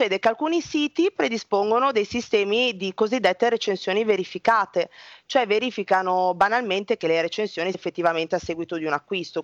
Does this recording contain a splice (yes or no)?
yes